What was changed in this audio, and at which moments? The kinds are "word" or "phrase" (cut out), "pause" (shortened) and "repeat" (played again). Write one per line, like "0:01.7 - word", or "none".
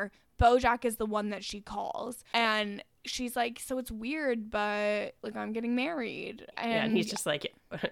none